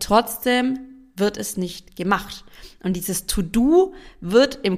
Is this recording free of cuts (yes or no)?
yes